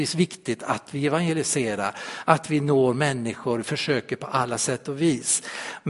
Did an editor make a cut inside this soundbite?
no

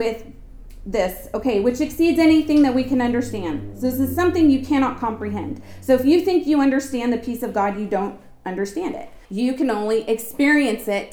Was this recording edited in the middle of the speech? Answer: yes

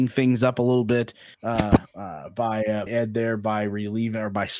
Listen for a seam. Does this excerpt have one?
yes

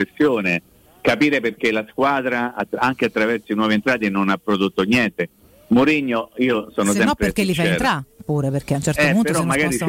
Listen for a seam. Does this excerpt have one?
no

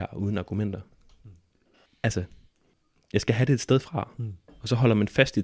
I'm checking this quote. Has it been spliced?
no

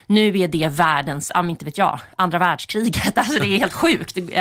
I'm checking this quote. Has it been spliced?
no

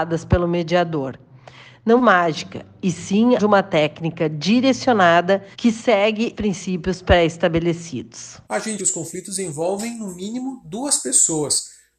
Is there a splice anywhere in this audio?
yes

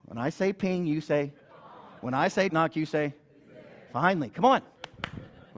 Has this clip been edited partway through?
yes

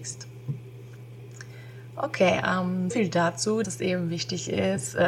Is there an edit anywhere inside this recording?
yes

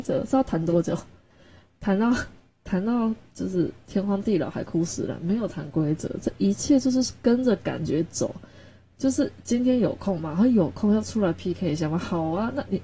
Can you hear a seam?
no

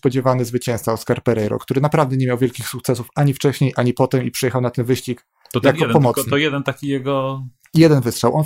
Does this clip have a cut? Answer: no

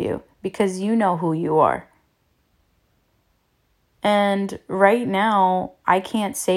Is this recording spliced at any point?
no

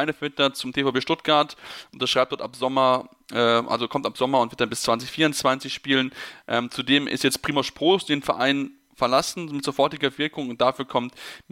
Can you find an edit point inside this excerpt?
no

